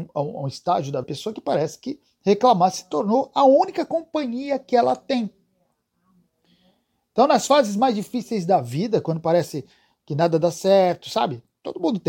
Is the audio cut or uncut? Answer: cut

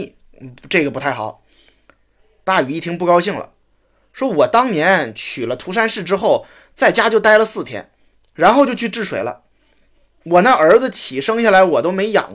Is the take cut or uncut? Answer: uncut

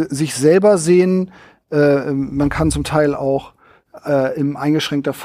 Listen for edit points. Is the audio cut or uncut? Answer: uncut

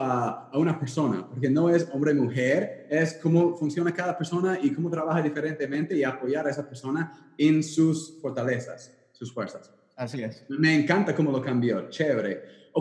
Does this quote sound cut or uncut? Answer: uncut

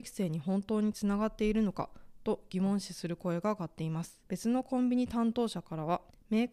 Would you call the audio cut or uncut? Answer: cut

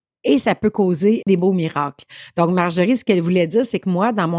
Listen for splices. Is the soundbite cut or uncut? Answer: uncut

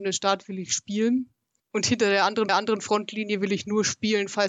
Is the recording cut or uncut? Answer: cut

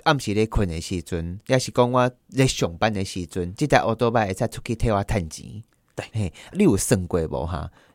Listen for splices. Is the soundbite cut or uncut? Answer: uncut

